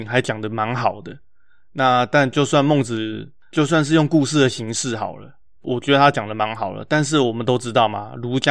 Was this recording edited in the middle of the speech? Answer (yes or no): no